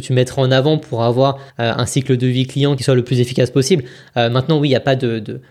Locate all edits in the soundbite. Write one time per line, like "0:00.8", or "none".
0:01.5